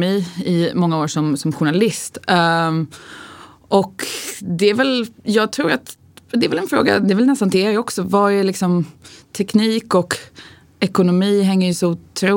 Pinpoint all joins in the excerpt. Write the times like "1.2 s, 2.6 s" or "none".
none

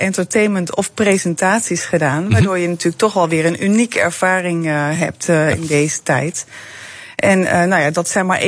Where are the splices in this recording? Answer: none

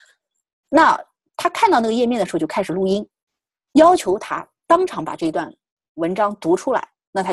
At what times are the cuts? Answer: none

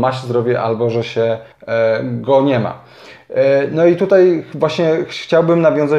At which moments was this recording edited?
1.5 s

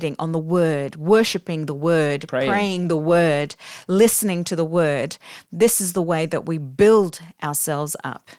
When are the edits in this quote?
none

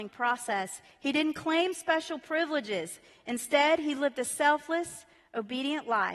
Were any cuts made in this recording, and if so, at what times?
none

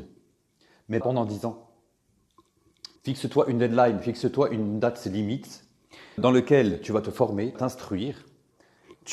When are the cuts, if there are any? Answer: 1.0 s, 3.0 s, 6.2 s, 7.5 s

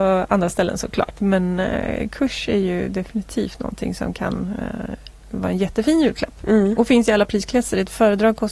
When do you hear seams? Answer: none

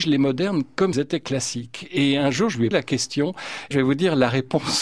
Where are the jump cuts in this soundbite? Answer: 0.9 s, 2.7 s, 3.7 s

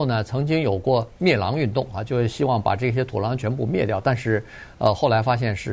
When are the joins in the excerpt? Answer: none

